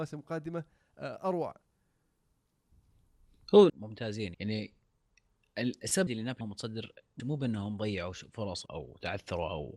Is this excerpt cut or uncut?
cut